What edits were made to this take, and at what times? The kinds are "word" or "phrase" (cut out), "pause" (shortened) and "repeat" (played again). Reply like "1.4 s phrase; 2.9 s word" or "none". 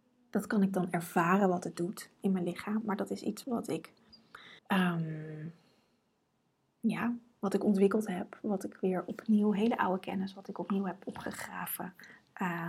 3.4 s word; 4.6 s pause